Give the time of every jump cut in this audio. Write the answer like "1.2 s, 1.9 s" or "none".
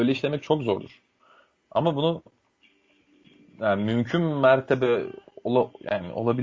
none